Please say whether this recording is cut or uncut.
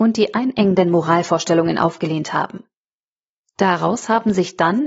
uncut